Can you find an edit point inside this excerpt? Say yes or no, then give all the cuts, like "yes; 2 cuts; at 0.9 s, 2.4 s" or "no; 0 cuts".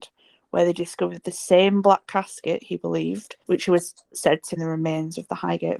yes; 2 cuts; at 3.4 s, 4.6 s